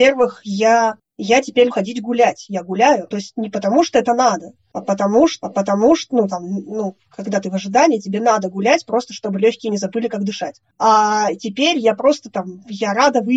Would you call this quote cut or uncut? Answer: cut